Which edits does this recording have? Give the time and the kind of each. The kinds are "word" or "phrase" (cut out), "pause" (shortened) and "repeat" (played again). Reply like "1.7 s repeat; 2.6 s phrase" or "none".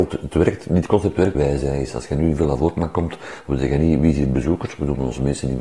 1.3 s phrase